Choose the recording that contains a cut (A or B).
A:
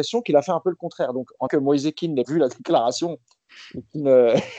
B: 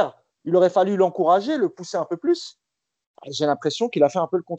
A